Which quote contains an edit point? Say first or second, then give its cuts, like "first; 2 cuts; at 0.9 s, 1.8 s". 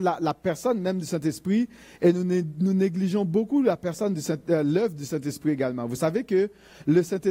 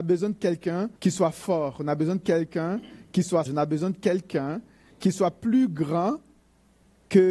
second; 2 cuts; at 1.0 s, 3.5 s